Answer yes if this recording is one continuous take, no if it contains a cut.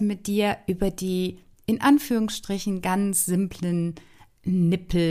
yes